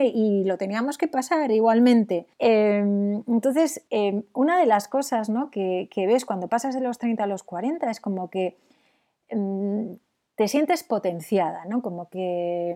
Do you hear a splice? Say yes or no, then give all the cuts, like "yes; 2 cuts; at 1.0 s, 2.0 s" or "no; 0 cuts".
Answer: yes; 2 cuts; at 2.3 s, 3.9 s